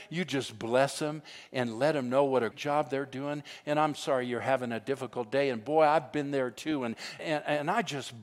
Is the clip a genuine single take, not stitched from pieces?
no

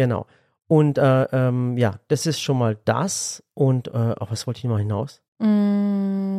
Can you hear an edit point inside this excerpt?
yes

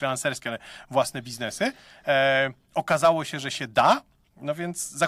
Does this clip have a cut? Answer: no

